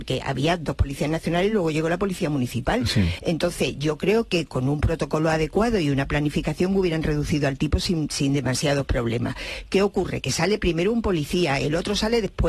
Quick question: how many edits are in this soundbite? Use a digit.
0